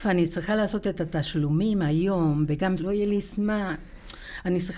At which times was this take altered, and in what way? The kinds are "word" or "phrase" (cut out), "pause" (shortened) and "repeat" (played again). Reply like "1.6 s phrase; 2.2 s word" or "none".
2.8 s word